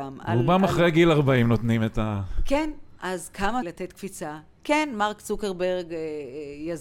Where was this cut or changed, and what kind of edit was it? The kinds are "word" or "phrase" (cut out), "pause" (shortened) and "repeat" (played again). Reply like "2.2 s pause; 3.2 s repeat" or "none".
3.6 s phrase